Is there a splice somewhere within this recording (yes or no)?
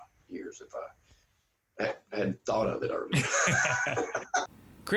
no